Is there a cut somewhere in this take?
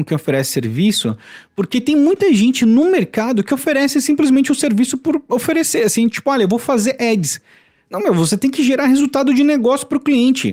no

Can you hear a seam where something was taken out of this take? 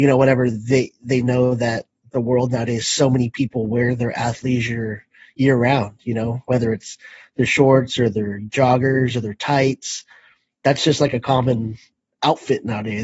no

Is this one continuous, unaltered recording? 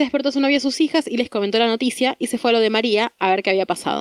yes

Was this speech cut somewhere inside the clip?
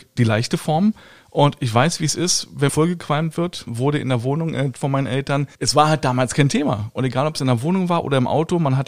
yes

